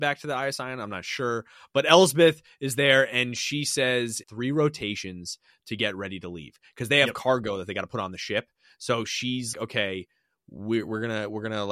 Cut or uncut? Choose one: cut